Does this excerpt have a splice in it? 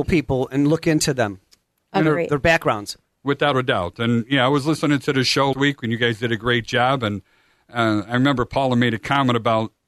yes; 1 cut; at 5.5 s

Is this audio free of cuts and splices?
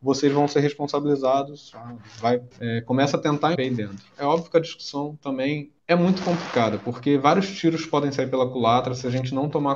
no; 4 cuts; at 1.7 s, 2.5 s, 3.5 s, 5.8 s

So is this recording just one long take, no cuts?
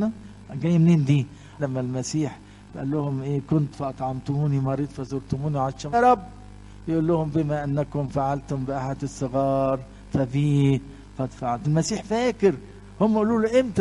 no; 5 cuts; at 1.6 s, 3.7 s, 5.9 s, 9.0 s, 11.6 s

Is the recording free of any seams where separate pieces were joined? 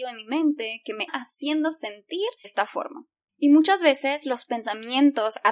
no; 2 cuts; at 1.1 s, 2.4 s

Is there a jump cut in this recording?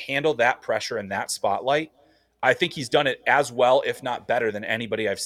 no; 0 cuts

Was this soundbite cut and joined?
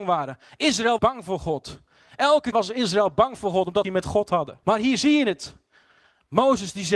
yes; 4 cuts; at 1.0 s, 2.5 s, 3.8 s, 4.6 s

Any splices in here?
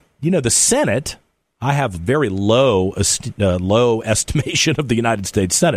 no; 0 cuts

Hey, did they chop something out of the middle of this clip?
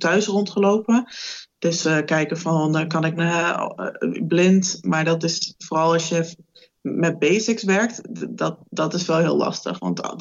yes; 1 cut; at 3.2 s

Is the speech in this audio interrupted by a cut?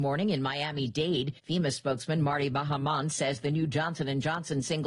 yes; 1 cut; at 1.4 s

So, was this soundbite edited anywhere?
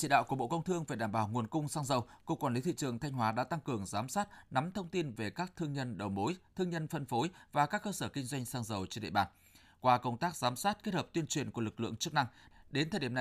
no; 0 cuts

